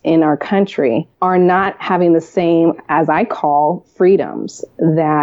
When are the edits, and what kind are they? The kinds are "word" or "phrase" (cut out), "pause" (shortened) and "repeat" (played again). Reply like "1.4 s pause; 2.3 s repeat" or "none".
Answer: 1.1 s pause